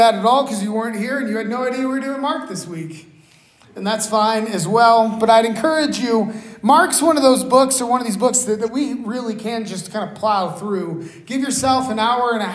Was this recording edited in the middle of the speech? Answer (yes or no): no